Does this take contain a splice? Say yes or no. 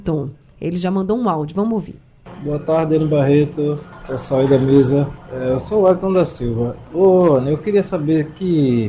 no